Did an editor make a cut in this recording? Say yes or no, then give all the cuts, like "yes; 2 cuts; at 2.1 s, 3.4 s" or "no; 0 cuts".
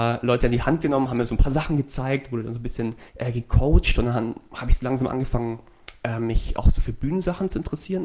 yes; 1 cut; at 3.1 s